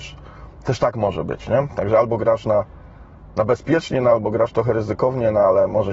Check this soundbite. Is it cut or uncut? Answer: uncut